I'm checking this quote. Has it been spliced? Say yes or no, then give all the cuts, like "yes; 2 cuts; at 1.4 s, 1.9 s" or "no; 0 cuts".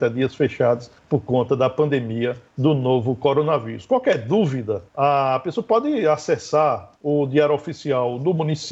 yes; 4 cuts; at 1.0 s, 2.5 s, 4.9 s, 7.0 s